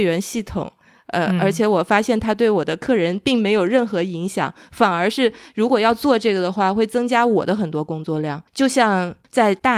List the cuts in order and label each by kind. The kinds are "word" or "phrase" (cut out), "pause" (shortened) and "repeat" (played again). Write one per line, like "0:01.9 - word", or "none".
0:08.5 - pause